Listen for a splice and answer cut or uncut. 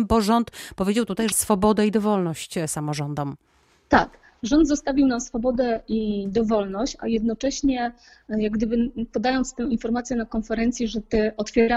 cut